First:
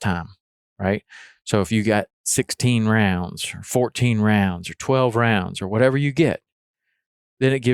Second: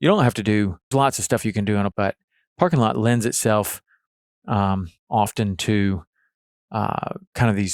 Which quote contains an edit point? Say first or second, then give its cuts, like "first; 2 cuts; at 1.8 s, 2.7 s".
second; 3 cuts; at 0.9 s, 1.9 s, 5.0 s